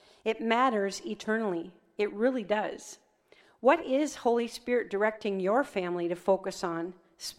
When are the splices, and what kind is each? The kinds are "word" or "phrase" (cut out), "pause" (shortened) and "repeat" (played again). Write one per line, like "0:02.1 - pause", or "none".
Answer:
none